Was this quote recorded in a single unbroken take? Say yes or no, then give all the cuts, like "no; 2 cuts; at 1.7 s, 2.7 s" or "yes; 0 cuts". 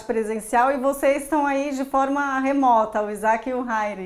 yes; 0 cuts